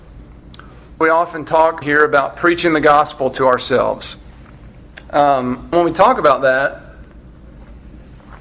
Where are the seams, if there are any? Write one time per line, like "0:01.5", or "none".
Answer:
0:01.0
0:01.8
0:05.7